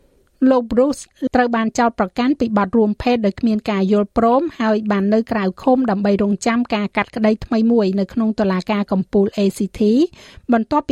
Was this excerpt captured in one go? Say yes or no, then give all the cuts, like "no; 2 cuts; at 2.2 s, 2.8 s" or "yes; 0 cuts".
no; 1 cut; at 1.3 s